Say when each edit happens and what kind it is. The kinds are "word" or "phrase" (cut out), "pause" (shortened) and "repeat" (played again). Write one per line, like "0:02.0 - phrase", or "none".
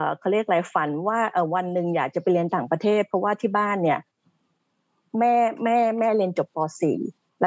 none